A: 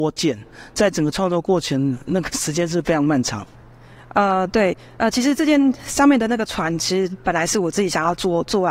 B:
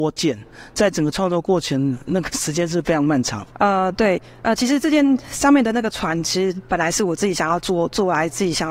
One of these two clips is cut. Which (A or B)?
B